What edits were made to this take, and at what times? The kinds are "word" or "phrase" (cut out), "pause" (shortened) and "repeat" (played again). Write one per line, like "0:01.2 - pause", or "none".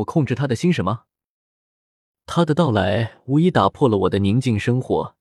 none